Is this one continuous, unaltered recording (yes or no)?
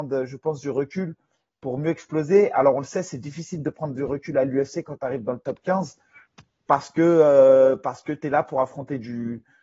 yes